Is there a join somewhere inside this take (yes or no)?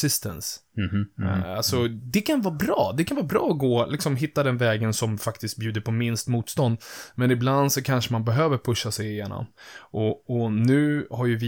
no